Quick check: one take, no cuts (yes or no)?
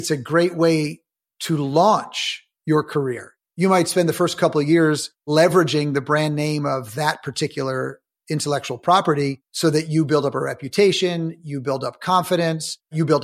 yes